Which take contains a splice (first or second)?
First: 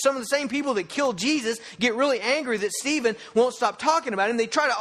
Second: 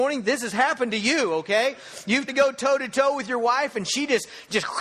second